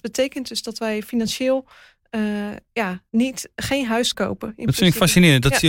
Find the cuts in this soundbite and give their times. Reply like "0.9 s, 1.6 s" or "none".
3.1 s, 4.1 s